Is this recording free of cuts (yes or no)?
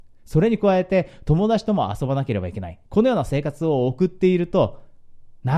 no